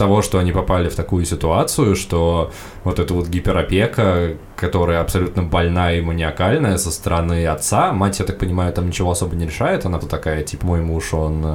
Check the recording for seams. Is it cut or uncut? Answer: cut